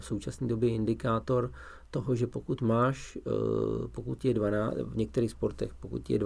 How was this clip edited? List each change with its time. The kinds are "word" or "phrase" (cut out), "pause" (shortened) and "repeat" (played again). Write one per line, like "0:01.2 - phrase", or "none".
none